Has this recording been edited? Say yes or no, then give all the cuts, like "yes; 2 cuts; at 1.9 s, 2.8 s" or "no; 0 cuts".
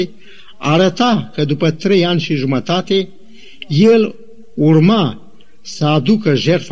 no; 0 cuts